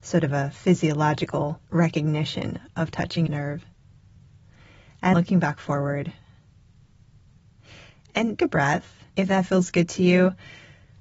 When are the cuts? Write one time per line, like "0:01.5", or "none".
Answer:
0:01.7
0:03.3
0:05.1
0:08.4
0:09.1